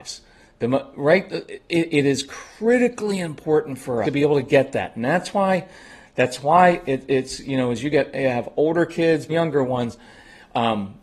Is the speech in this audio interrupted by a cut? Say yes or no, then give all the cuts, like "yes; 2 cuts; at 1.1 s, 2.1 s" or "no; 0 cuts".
yes; 2 cuts; at 4.0 s, 9.3 s